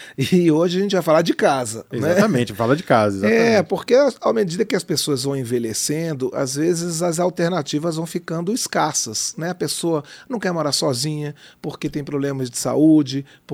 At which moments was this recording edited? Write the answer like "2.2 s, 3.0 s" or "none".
none